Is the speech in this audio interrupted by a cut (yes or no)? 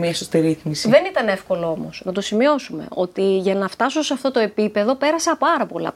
no